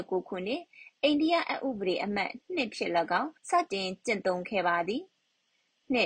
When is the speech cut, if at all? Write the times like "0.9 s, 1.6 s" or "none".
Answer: 3.4 s